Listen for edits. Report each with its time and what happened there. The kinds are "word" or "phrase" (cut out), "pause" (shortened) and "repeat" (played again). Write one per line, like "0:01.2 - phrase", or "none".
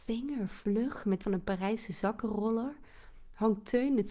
0:01.2 - word